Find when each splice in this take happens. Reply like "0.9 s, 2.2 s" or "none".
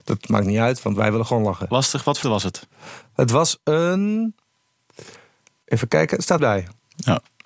2.2 s, 6.4 s